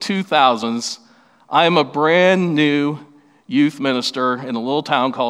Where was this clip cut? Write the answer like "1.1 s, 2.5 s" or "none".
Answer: none